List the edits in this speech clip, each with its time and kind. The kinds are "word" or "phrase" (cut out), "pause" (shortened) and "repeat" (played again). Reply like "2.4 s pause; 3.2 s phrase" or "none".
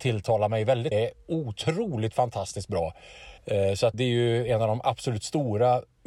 0.9 s phrase; 3.4 s pause; 3.9 s word

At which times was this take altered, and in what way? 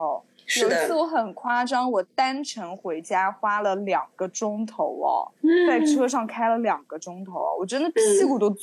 5.4 s pause

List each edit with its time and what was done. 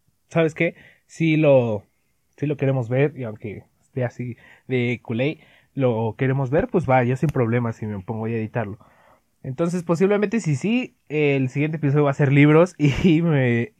none

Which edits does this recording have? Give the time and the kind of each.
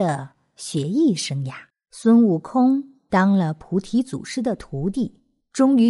1.7 s pause

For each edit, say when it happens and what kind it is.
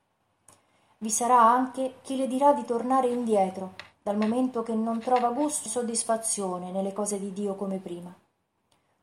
5.7 s word

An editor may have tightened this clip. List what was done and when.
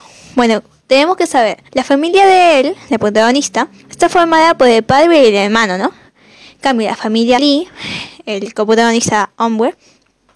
1.7 s pause; 3.8 s pause; 7.4 s word

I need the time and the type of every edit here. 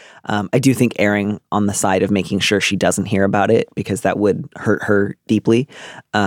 none

